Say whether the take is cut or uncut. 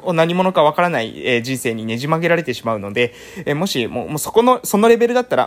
uncut